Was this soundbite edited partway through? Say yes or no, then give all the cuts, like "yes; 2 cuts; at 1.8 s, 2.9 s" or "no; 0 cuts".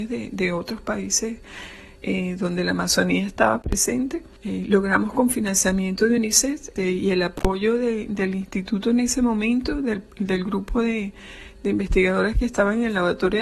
no; 0 cuts